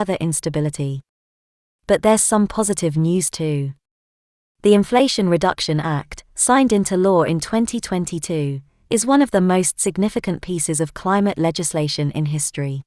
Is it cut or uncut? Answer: uncut